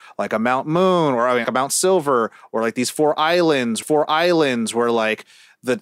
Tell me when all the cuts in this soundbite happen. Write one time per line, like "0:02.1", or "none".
0:01.4
0:03.8